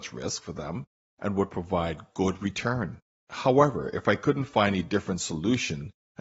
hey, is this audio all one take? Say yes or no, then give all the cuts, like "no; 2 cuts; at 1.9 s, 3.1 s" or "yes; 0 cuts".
yes; 0 cuts